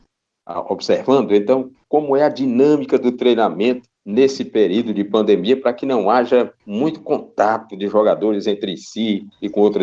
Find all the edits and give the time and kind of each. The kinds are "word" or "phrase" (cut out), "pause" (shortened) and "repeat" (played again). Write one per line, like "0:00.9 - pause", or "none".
0:03.9 - pause
0:06.6 - pause